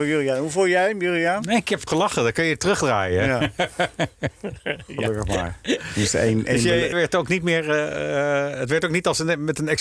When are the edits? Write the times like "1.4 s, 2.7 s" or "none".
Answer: 1.9 s, 6.9 s

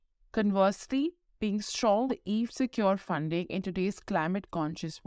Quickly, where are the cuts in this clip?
2.1 s, 2.5 s

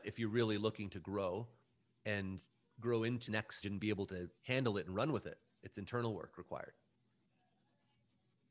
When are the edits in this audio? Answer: 2.6 s, 3.3 s, 3.6 s, 4.4 s, 5.6 s

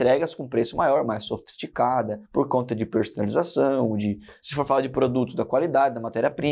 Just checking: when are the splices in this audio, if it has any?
2.2 s

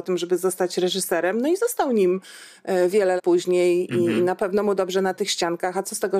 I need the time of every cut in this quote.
3.2 s

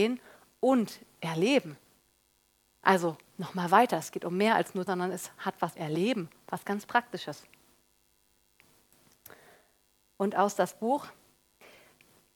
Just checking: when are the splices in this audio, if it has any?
2.1 s, 4.9 s, 5.8 s

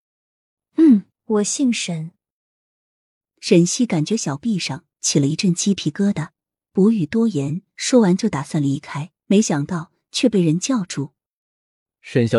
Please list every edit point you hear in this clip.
1.1 s, 9.2 s

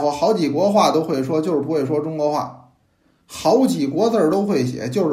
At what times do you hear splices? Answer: none

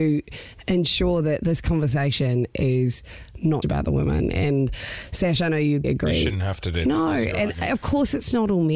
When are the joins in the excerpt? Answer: 3.6 s, 5.8 s

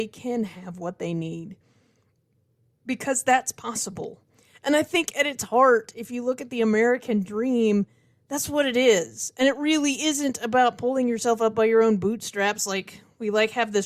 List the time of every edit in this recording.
none

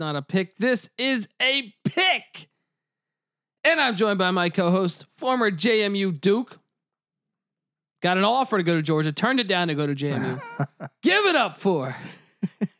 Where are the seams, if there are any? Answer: none

